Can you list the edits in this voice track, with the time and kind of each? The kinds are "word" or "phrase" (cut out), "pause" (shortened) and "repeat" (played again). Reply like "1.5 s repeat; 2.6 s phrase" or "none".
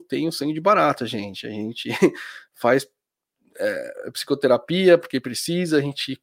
none